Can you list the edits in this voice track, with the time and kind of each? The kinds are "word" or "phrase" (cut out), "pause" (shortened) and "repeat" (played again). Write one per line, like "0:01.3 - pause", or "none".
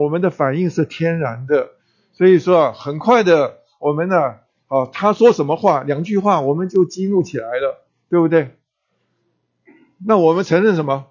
none